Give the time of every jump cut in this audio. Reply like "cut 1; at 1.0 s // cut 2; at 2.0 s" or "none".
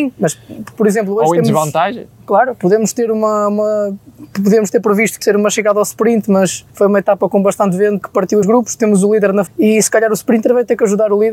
cut 1; at 5.2 s // cut 2; at 6.7 s // cut 3; at 8.0 s // cut 4; at 8.4 s // cut 5; at 9.5 s

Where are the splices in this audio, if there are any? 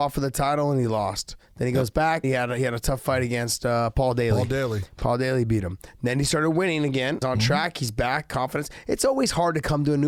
cut 1; at 2.2 s // cut 2; at 7.2 s

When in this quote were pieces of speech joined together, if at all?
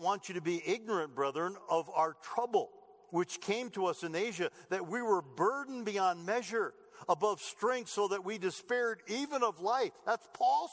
none

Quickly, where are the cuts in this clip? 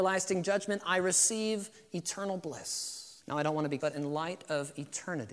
cut 1; at 3.2 s // cut 2; at 3.8 s

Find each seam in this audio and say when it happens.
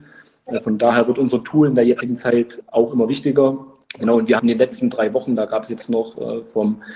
cut 1; at 2.6 s // cut 2; at 3.8 s // cut 3; at 4.4 s

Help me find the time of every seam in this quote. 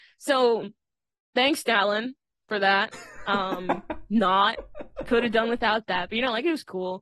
none

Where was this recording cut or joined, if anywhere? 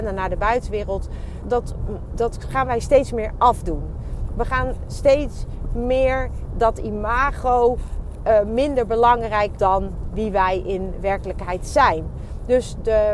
cut 1; at 1.4 s // cut 2; at 9.6 s

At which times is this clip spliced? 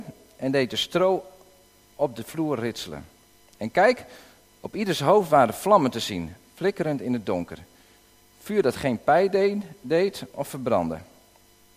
none

